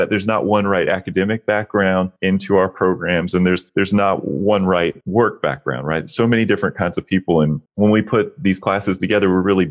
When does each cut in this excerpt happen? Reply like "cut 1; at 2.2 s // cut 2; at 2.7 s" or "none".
cut 1; at 2.2 s // cut 2; at 3.7 s // cut 3; at 5.0 s // cut 4; at 7.7 s